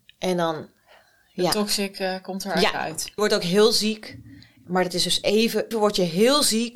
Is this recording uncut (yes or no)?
no